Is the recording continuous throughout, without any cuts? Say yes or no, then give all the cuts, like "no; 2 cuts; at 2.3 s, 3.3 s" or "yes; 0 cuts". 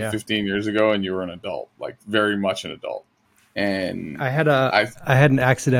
no; 1 cut; at 3.3 s